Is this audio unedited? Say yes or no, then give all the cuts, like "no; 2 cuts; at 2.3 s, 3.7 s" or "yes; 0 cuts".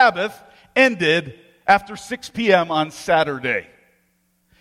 yes; 0 cuts